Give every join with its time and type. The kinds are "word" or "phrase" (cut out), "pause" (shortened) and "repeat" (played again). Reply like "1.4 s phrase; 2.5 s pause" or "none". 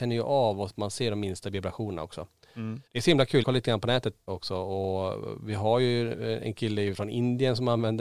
2.9 s pause; 3.4 s word; 4.3 s word